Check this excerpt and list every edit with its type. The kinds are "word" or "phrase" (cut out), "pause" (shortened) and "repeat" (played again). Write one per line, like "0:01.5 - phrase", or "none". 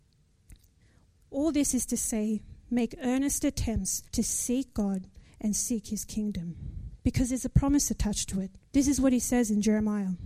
0:04.1 - pause
0:07.0 - pause
0:08.7 - pause

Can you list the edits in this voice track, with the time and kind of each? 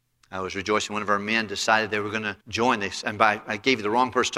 0:02.4 - pause

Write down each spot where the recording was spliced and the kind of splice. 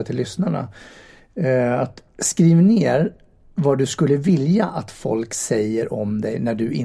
none

